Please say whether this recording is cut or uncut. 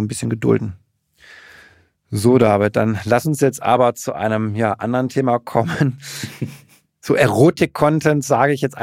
uncut